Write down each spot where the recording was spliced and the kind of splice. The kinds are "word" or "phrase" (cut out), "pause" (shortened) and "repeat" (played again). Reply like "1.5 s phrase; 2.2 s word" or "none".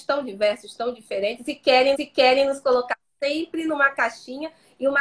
1.9 s repeat